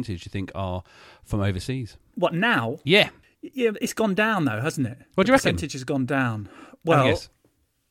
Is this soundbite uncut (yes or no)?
yes